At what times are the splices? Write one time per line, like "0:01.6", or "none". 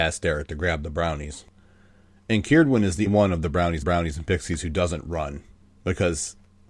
0:03.1
0:03.8